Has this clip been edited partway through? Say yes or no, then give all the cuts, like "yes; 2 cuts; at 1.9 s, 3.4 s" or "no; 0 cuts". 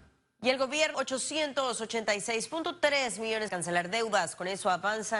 yes; 2 cuts; at 0.9 s, 3.5 s